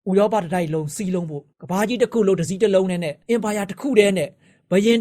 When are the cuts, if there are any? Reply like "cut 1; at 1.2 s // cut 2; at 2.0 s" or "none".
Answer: cut 1; at 1.5 s // cut 2; at 3.2 s